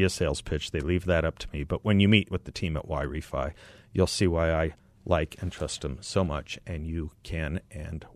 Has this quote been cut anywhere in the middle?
no; 0 cuts

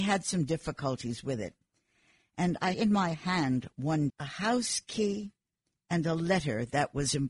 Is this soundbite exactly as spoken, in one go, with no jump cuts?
no; 2 cuts; at 2.7 s, 4.1 s

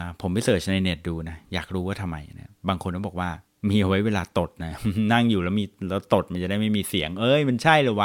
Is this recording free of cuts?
no; 2 cuts; at 2.6 s, 3.4 s

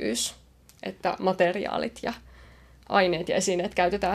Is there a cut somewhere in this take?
no; 0 cuts

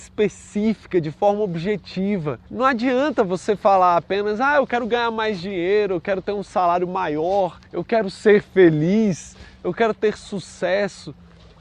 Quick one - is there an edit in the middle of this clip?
yes; 2 cuts; at 2.5 s, 7.7 s

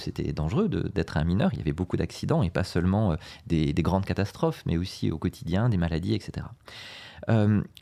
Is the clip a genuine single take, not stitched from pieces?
yes; 0 cuts

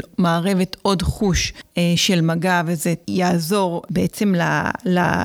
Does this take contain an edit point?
no; 0 cuts

